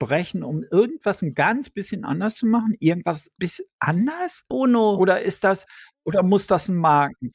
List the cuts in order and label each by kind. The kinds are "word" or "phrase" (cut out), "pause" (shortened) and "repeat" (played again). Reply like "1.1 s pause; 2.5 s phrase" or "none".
3.4 s word